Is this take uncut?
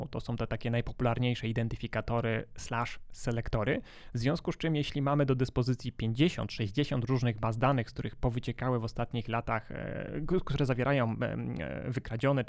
yes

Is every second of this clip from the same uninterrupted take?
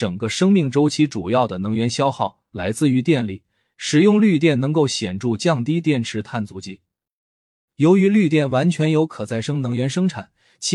yes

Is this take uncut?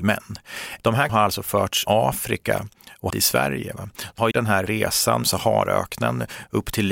no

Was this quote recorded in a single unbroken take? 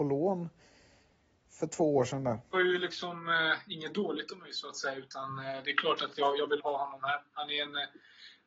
no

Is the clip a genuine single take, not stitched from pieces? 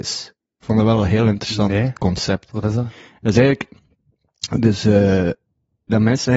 yes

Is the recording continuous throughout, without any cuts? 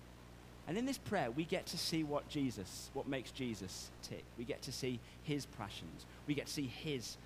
yes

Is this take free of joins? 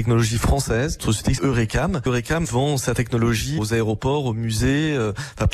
no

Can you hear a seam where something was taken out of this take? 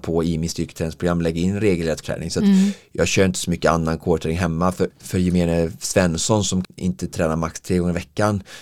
yes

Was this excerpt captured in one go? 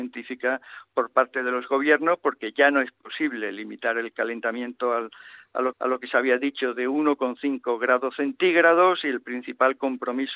no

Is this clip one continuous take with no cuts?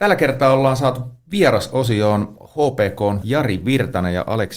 no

